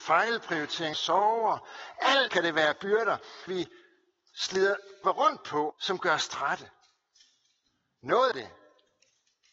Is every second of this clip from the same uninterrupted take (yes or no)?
no